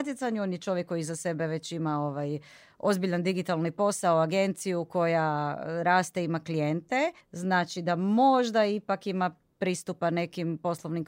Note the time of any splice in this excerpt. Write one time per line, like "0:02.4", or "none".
0:07.2